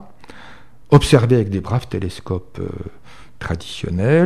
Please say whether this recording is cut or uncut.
uncut